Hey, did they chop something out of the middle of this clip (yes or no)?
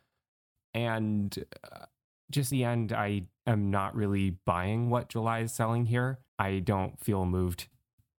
yes